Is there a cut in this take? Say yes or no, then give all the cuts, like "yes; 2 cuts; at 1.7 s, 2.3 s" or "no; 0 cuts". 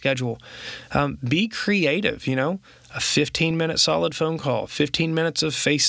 no; 0 cuts